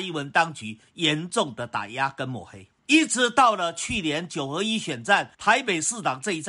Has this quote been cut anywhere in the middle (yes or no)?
yes